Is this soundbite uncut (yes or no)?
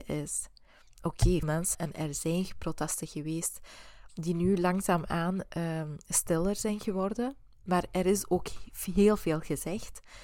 no